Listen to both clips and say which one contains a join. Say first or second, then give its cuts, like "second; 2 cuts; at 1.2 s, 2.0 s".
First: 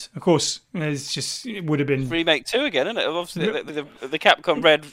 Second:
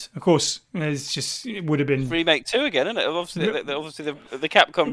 first; 1 cut; at 3.7 s